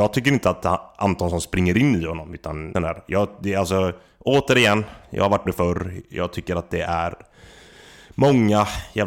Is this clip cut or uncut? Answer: cut